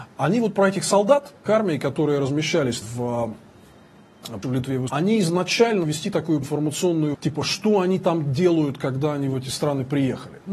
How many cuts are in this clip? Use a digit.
7